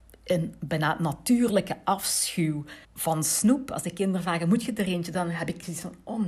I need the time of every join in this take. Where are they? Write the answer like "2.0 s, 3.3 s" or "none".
2.8 s